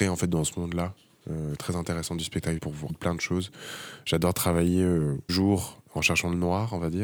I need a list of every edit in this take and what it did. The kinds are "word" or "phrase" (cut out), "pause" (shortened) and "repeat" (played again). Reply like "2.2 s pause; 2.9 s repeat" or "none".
2.6 s word; 2.9 s word; 5.3 s word